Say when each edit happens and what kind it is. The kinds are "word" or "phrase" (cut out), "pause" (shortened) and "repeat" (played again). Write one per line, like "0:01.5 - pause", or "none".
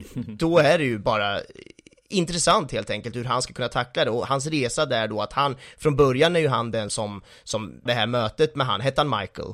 0:06.9 - word
0:07.9 - word